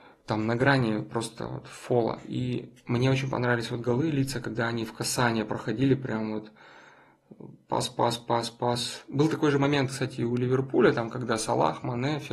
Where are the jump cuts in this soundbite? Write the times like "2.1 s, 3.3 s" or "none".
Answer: none